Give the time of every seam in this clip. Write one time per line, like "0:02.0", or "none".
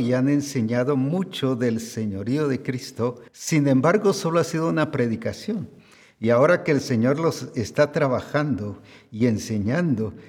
0:03.3